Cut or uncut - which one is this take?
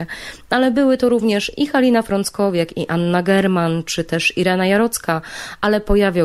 uncut